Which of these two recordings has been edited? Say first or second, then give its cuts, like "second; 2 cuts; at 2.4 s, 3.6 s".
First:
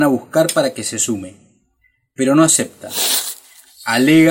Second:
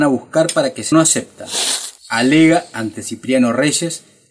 second; 2 cuts; at 0.9 s, 2.0 s